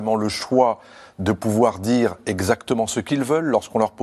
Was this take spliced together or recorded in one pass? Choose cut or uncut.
uncut